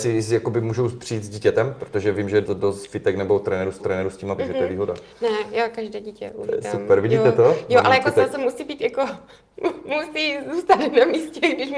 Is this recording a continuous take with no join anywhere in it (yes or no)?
no